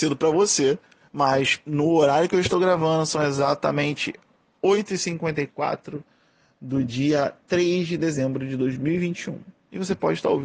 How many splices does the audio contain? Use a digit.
0